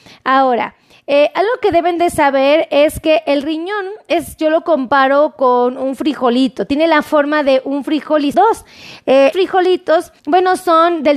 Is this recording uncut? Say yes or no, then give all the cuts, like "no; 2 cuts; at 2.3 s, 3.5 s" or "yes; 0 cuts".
no; 3 cuts; at 8.3 s, 9.3 s, 10.2 s